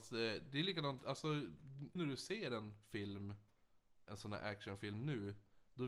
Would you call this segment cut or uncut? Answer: cut